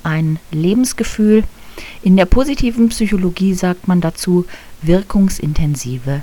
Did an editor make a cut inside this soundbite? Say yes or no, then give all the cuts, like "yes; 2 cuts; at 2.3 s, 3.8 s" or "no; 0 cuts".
no; 0 cuts